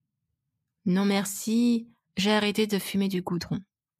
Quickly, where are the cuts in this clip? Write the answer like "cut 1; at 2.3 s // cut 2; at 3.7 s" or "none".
cut 1; at 2.0 s